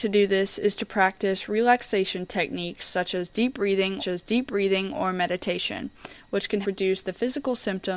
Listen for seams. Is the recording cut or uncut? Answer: cut